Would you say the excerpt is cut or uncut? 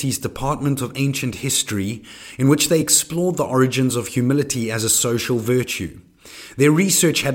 uncut